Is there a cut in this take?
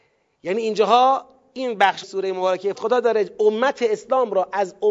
yes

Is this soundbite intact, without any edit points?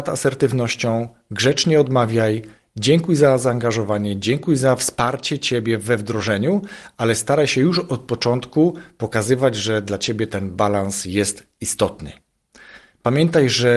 yes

